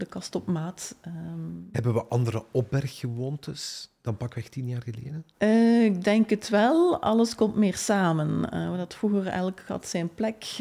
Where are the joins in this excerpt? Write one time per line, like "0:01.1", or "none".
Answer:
0:05.3